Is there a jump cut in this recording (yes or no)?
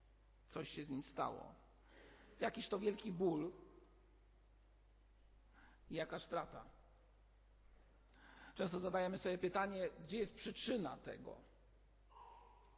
no